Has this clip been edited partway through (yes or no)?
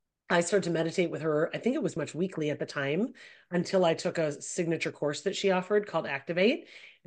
yes